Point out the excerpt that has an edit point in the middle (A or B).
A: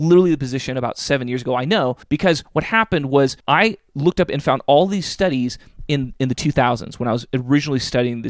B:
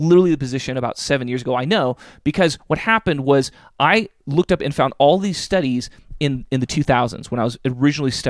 A